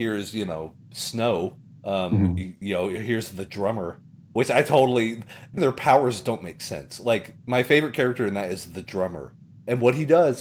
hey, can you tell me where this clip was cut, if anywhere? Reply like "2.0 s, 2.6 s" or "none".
1.6 s, 5.6 s